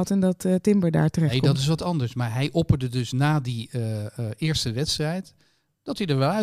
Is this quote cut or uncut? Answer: uncut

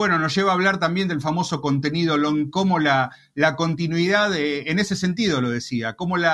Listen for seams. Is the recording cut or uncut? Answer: cut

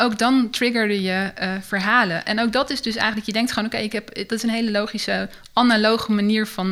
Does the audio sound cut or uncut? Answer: uncut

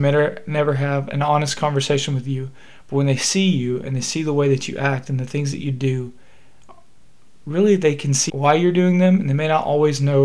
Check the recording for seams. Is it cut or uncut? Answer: cut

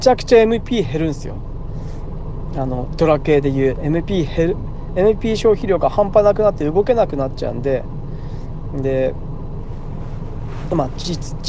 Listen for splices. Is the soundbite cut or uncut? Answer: uncut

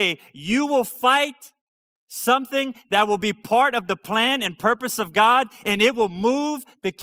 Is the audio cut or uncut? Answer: uncut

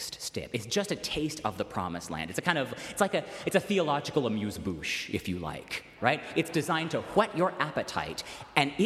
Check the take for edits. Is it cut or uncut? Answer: uncut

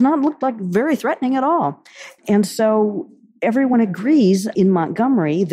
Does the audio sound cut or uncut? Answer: uncut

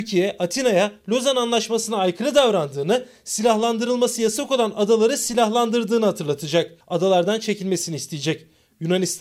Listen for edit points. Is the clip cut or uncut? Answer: cut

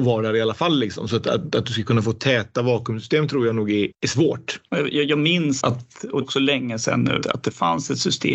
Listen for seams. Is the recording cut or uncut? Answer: cut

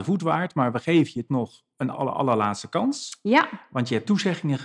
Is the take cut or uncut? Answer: cut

